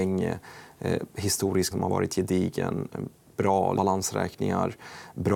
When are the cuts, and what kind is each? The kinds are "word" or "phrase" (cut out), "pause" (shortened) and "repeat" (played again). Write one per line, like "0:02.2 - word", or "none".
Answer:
0:01.7 - word
0:03.8 - word